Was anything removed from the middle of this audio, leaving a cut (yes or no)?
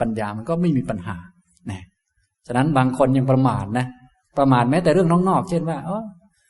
no